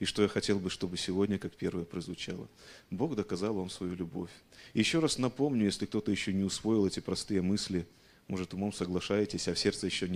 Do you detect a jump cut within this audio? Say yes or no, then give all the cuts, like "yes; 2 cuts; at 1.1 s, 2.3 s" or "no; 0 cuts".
no; 0 cuts